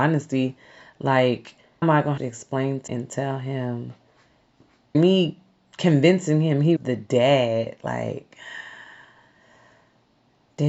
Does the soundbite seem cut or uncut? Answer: cut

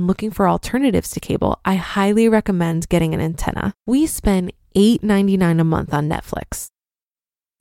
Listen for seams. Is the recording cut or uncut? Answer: cut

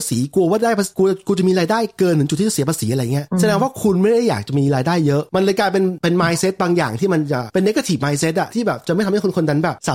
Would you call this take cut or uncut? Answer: uncut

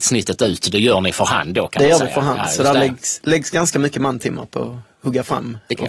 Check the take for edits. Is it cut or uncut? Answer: uncut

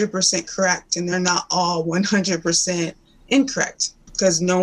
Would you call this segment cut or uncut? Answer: uncut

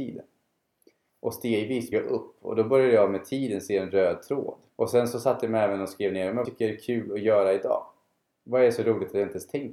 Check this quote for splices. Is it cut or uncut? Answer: cut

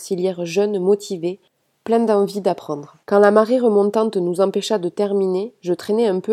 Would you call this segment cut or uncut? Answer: cut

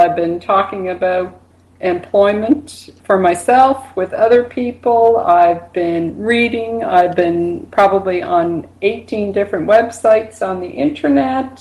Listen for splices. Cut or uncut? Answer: uncut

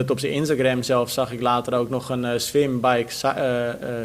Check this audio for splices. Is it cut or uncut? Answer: uncut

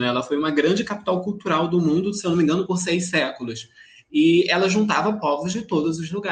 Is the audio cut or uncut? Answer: uncut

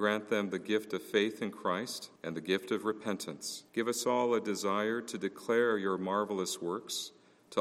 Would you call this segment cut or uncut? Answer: cut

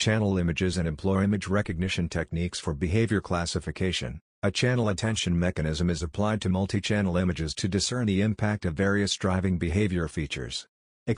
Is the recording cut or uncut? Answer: cut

